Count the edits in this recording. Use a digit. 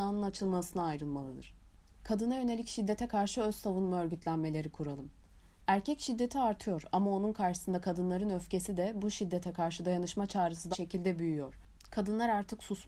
1